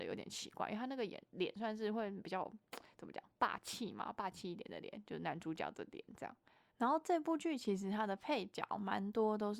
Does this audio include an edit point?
no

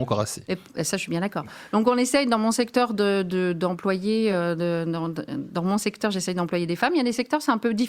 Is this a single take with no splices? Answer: yes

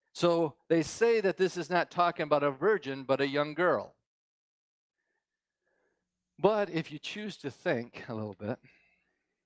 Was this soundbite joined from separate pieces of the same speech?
no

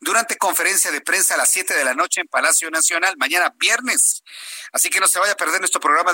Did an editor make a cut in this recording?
no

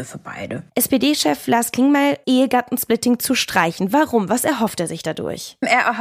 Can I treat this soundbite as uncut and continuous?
no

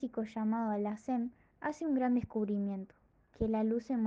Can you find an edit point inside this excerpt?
no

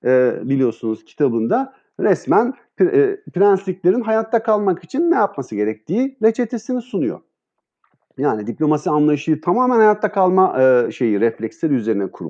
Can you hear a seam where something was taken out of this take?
no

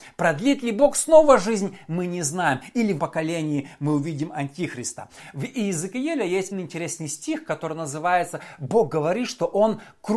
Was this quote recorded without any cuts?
no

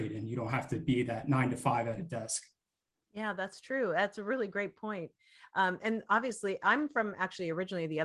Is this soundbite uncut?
yes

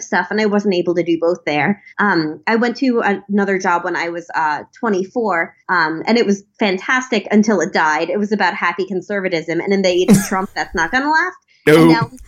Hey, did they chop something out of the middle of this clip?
yes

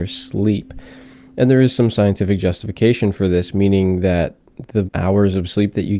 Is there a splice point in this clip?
yes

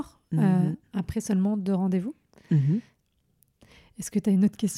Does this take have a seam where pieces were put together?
no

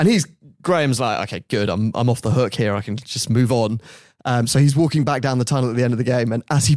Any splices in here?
no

